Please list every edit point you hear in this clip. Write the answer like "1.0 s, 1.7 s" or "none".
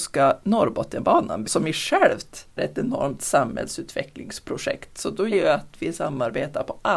1.4 s, 2.6 s, 5.3 s

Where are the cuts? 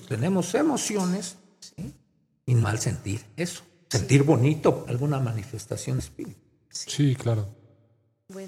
2.6 s, 4.8 s, 6.0 s

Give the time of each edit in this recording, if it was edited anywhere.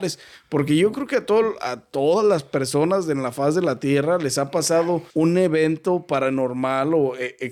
5.1 s

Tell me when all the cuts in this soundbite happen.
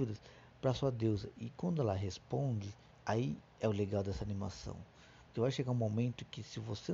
2.9 s

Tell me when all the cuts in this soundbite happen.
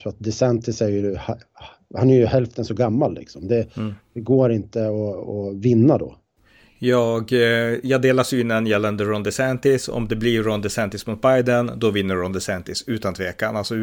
none

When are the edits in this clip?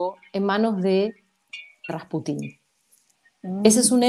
1.9 s

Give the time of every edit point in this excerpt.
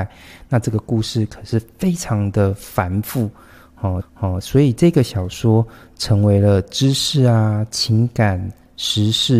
4.0 s

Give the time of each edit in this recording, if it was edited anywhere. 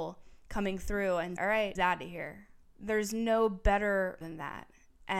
1.4 s, 1.8 s, 2.6 s, 4.2 s

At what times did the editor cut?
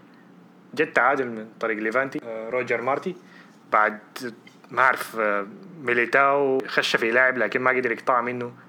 none

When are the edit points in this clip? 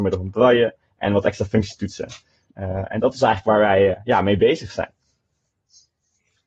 none

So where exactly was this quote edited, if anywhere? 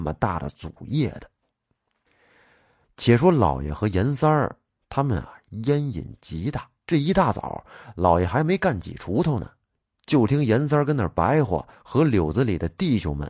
6.8 s

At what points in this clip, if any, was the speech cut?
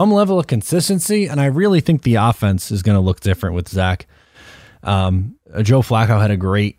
5.4 s

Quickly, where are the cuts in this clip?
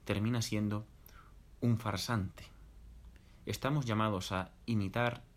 none

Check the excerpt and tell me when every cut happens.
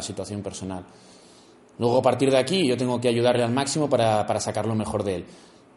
none

